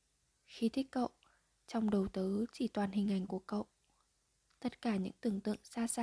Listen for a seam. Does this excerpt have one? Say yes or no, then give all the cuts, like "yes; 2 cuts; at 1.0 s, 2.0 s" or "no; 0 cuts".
no; 0 cuts